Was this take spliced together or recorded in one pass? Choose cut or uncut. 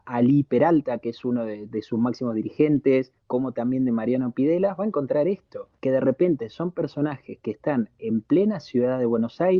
cut